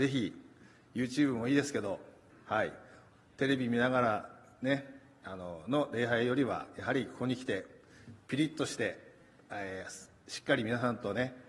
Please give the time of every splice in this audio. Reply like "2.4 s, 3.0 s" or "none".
none